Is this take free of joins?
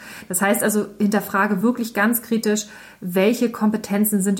yes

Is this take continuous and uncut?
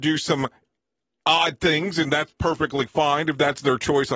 yes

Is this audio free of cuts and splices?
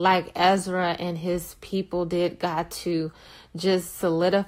yes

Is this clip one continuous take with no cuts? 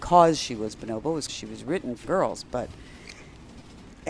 no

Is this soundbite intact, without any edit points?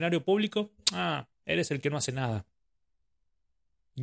yes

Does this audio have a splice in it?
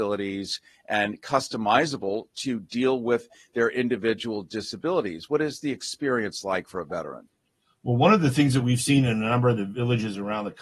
no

